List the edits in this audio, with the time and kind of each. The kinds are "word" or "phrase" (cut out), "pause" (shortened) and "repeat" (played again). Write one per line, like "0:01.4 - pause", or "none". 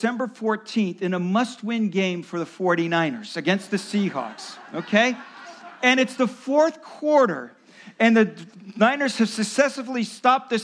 none